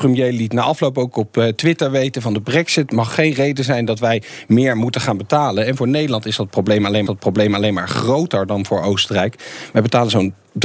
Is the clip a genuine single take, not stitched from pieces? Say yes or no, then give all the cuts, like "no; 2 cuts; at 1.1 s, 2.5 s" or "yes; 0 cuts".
no; 1 cut; at 7.1 s